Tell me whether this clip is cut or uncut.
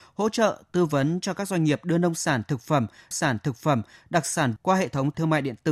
cut